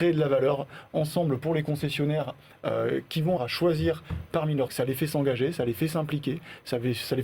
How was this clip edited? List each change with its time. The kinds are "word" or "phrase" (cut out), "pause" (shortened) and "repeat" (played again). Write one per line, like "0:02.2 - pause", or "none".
0:03.4 - word
0:04.7 - word